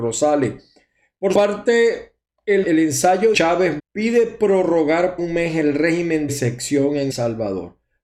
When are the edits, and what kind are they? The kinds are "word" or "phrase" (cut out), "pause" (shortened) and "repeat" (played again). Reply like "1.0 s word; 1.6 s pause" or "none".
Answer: 1.3 s word; 2.6 s word; 3.3 s word; 3.8 s word; 5.2 s word; 6.3 s word; 7.1 s word